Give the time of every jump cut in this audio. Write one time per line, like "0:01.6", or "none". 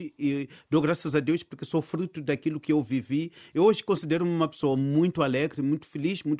none